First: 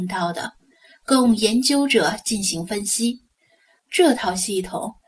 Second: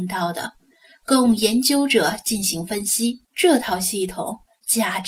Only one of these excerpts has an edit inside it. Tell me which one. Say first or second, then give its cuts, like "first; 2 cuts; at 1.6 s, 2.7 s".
second; 1 cut; at 3.2 s